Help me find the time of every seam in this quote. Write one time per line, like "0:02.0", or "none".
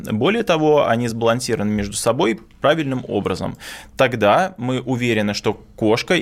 none